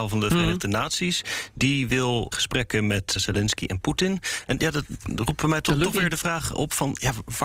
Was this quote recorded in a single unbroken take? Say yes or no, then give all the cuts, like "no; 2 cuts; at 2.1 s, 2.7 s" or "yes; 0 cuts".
no; 3 cuts; at 2.3 s, 3.2 s, 5.0 s